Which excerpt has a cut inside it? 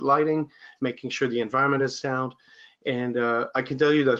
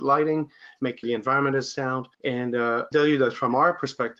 second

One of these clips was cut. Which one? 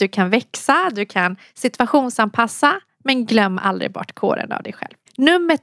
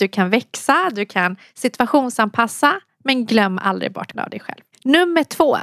second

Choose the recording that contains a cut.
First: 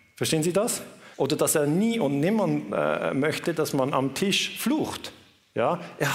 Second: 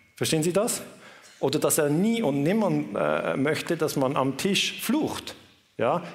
first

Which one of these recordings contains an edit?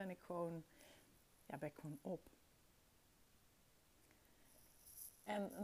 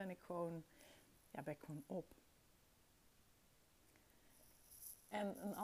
second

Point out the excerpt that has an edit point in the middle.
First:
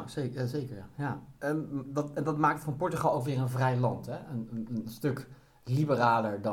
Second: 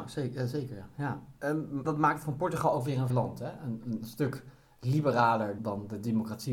second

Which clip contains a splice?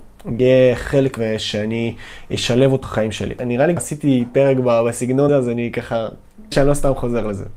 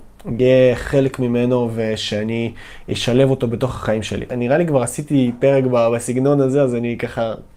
first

